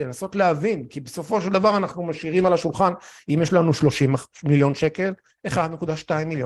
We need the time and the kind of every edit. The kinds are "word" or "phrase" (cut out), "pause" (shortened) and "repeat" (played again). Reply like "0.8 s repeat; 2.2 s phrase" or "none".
5.3 s word